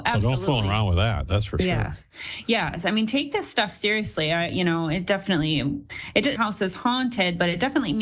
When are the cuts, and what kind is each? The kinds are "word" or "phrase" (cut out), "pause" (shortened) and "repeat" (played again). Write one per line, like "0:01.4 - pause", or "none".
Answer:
0:06.4 - phrase